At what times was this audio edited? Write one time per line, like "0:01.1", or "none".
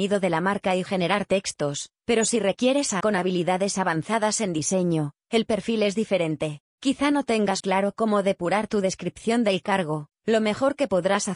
0:03.0
0:06.7
0:07.6